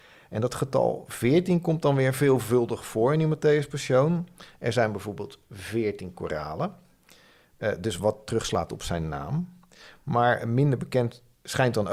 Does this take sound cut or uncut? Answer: uncut